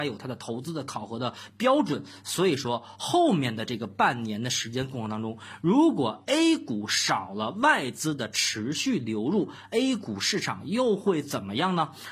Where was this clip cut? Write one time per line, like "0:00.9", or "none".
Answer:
none